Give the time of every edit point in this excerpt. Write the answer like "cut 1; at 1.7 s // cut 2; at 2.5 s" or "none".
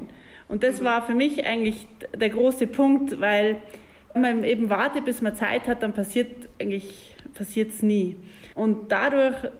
cut 1; at 4.1 s // cut 2; at 8.5 s

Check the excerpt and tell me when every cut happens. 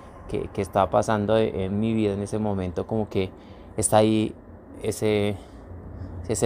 none

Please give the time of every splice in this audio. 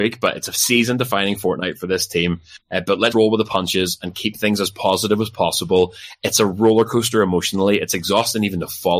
cut 1; at 2.6 s // cut 2; at 3.1 s

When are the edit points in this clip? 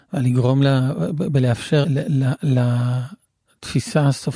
cut 1; at 1.8 s

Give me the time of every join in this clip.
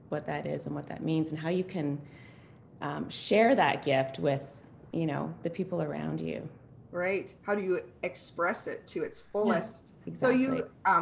cut 1; at 10.0 s

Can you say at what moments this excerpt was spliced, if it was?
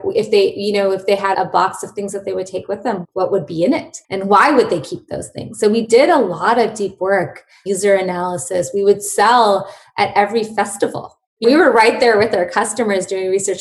cut 1; at 1.3 s // cut 2; at 4.0 s // cut 3; at 11.4 s

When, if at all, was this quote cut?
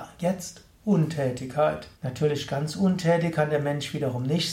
cut 1; at 1.9 s

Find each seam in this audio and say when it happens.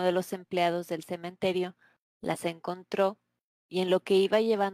none

